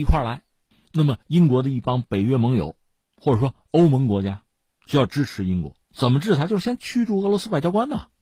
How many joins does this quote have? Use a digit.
1